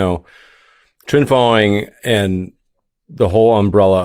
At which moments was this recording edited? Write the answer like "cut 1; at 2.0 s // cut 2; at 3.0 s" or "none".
none